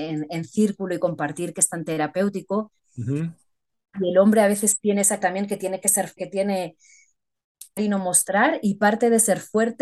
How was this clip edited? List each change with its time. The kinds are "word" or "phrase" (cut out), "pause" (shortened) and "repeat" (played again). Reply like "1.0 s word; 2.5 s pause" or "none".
5.2 s word; 6.2 s word; 7.8 s word